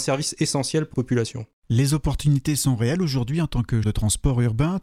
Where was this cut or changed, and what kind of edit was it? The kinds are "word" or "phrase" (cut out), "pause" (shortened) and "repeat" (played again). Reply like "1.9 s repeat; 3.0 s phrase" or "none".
0.9 s word; 3.8 s word